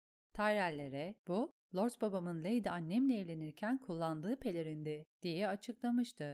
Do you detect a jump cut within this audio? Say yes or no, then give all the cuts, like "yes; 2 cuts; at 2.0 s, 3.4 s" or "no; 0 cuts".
yes; 2 cuts; at 1.2 s, 5.1 s